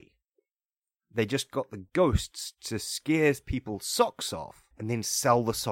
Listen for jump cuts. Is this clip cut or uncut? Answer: cut